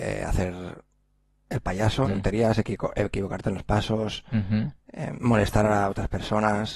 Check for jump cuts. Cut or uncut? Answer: cut